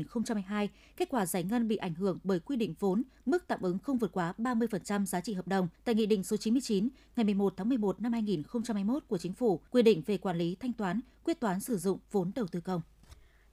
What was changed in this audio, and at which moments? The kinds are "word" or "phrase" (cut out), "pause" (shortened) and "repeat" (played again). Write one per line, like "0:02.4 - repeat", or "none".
0:05.7 - pause
0:09.7 - pause

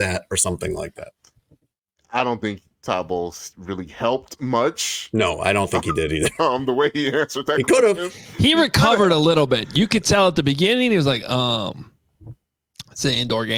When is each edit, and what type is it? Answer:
none

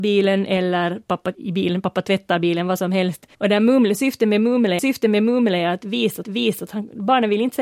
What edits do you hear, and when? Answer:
0:01.3 - word
0:03.3 - pause
0:04.8 - repeat
0:06.2 - repeat

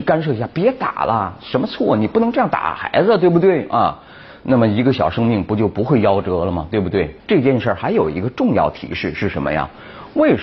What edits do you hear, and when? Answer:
0:07.2 - pause

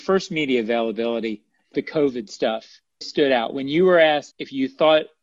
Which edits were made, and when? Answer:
0:01.7 - word
0:03.0 - word
0:04.3 - word

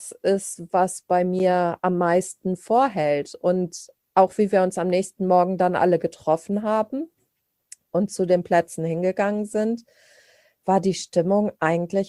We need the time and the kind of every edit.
none

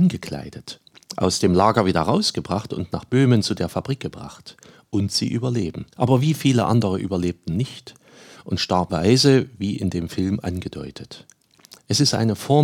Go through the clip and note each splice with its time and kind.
0:05.9 - pause
0:08.9 - phrase

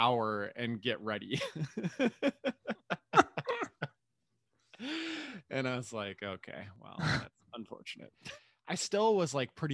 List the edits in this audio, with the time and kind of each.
none

